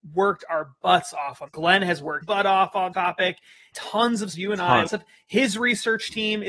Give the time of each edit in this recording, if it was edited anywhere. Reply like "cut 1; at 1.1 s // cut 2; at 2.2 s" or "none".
cut 1; at 1.5 s // cut 2; at 2.2 s // cut 3; at 2.9 s // cut 4; at 3.7 s // cut 5; at 4.3 s // cut 6; at 4.9 s